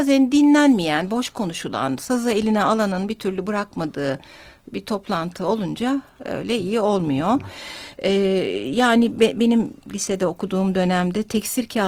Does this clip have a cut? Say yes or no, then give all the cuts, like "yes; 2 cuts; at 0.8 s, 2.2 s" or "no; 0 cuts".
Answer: no; 0 cuts